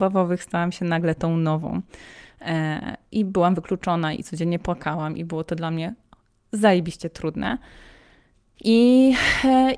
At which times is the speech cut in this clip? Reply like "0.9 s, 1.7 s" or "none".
none

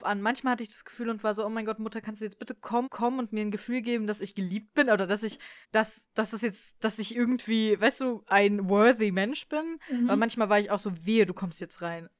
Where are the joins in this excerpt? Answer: 2.8 s, 5.6 s

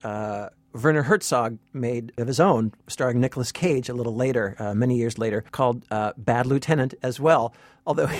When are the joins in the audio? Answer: 2.2 s, 5.5 s

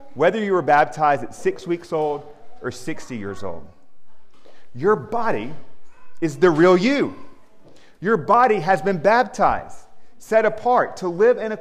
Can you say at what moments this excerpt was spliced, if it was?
none

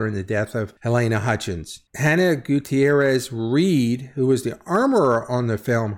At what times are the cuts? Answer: none

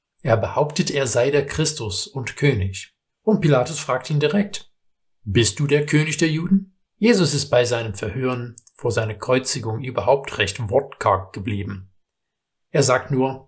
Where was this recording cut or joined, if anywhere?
3.1 s, 6.8 s

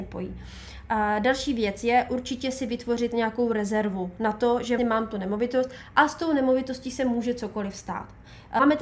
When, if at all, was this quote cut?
4.8 s

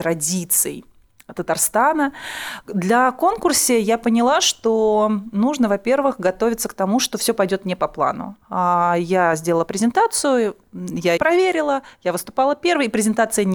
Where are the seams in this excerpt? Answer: 11.2 s

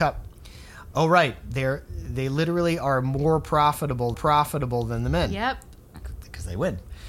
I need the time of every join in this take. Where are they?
4.1 s

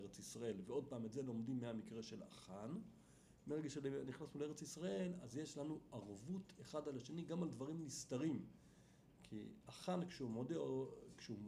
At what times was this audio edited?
none

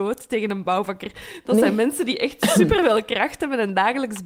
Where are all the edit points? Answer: none

